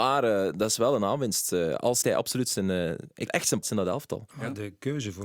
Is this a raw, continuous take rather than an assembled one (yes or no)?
no